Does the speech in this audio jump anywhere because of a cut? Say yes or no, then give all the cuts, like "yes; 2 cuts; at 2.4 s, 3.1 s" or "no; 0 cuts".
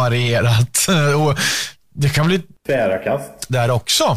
no; 0 cuts